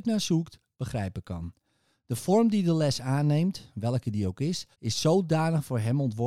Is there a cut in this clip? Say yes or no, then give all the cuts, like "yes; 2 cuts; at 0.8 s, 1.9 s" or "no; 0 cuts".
yes; 1 cut; at 4.7 s